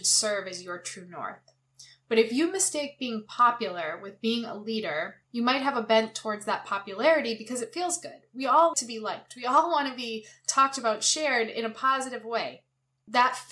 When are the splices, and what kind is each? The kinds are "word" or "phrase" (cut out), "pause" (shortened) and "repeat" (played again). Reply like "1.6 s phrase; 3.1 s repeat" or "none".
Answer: 5.2 s pause; 8.7 s word

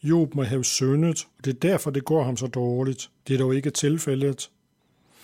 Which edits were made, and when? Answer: 1.3 s pause; 3.2 s pause

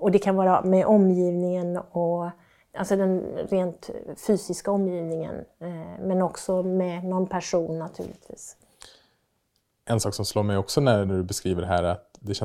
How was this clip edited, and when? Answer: none

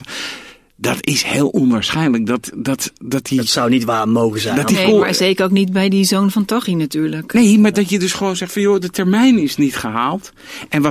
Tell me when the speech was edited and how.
none

